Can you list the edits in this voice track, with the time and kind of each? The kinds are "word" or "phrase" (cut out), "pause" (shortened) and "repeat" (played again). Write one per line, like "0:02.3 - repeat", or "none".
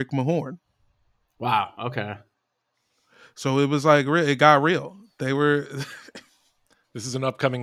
none